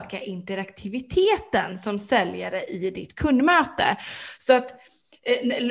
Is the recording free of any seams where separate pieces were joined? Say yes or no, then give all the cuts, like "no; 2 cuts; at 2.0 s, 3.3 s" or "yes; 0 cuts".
yes; 0 cuts